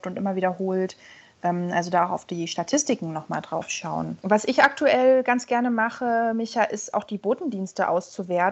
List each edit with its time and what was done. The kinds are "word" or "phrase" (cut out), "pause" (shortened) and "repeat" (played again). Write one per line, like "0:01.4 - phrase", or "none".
none

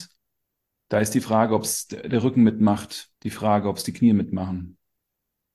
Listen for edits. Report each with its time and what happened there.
0:03.2 - pause

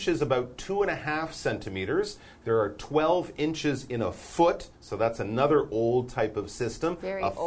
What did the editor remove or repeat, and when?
0:04.7 - pause

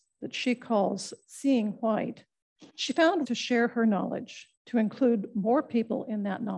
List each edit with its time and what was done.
0:02.7 - pause
0:03.2 - word
0:04.6 - pause

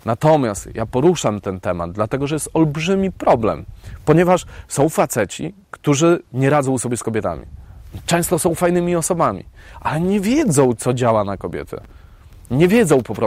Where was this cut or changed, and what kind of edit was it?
none

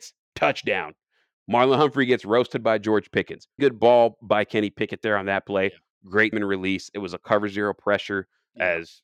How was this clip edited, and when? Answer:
0:03.6 - word
0:06.3 - word

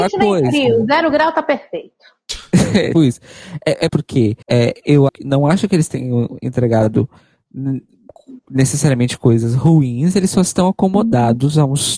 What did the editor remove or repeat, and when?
0:02.9 - word
0:03.9 - phrase
0:04.4 - pause
0:05.1 - word
0:08.4 - pause

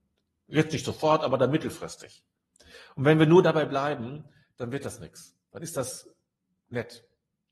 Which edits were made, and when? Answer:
none

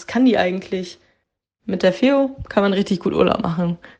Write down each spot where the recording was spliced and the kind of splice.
none

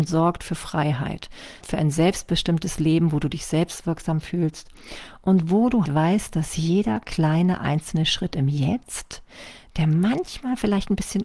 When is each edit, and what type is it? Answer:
0:01.6 - word
0:05.9 - word

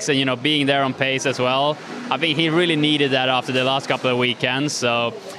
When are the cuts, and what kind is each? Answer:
none

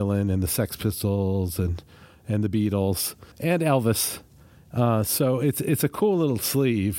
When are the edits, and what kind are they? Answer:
0:03.3 - pause

